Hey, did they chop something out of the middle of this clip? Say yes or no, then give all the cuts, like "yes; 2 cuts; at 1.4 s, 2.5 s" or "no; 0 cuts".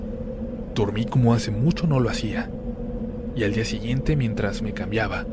no; 0 cuts